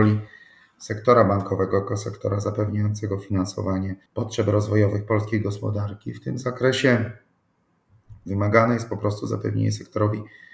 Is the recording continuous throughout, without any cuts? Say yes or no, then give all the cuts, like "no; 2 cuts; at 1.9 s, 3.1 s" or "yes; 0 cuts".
no; 1 cut; at 4.1 s